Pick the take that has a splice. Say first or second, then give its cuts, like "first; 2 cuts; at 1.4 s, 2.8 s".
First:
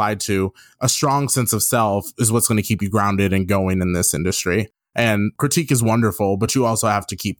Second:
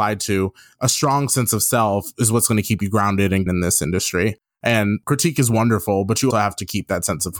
second; 2 cuts; at 3.5 s, 6.3 s